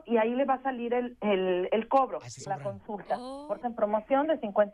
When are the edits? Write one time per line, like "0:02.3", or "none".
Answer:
0:01.7
0:02.5
0:03.6

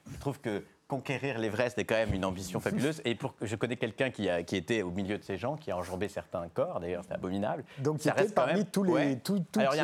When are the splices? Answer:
none

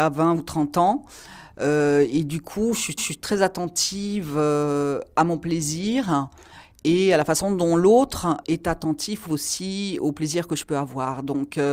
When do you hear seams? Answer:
0:03.0
0:08.4
0:09.3

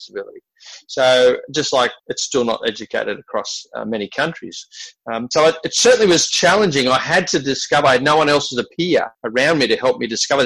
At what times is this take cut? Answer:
0:02.0
0:09.1

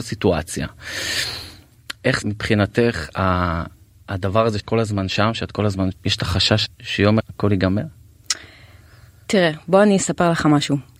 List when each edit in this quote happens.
0:02.2
0:04.6
0:05.9
0:06.7
0:07.2

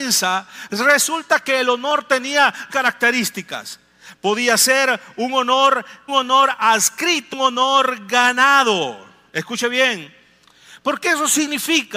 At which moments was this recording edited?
0:02.7
0:06.1
0:07.3

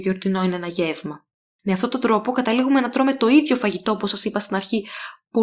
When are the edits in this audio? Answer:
none

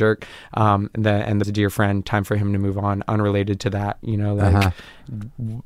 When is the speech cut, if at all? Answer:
0:01.4

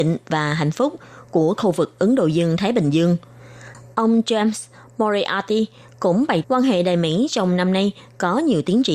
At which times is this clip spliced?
0:06.4

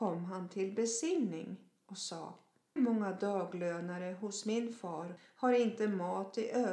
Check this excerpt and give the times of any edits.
0:02.8

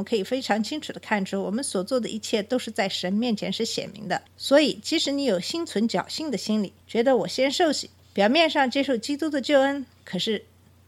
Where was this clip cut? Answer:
0:04.3
0:06.8

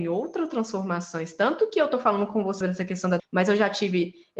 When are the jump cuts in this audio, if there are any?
0:02.6
0:03.2

